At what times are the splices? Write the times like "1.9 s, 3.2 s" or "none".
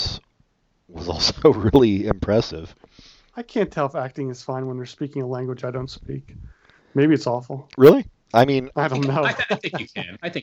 none